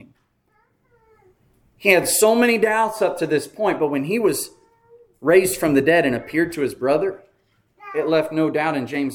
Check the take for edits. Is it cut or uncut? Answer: uncut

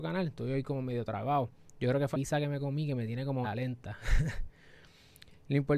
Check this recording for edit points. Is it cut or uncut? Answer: cut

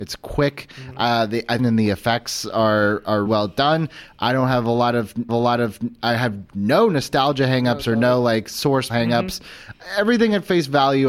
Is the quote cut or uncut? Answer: cut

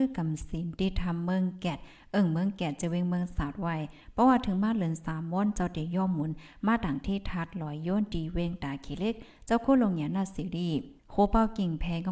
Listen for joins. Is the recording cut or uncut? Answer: cut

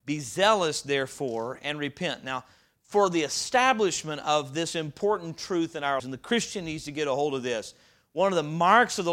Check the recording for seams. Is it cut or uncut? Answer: cut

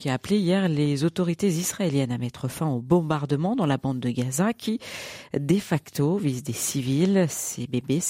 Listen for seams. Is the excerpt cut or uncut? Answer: uncut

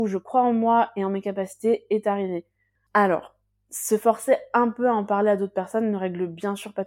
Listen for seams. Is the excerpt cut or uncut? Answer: uncut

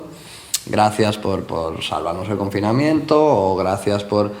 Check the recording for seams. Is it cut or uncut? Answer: uncut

